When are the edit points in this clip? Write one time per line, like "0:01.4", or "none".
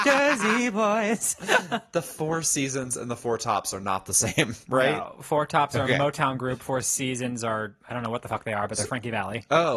0:07.8